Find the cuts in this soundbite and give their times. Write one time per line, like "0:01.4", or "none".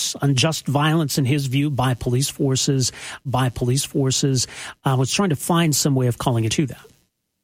0:03.3
0:06.5